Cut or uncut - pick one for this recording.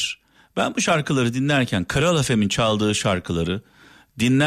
uncut